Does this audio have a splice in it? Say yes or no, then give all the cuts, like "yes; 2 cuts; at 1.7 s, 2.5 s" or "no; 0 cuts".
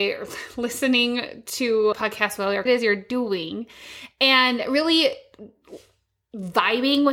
yes; 2 cuts; at 1.9 s, 2.7 s